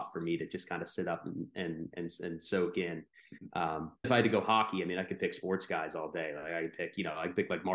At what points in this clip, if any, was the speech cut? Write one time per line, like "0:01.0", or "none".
0:04.0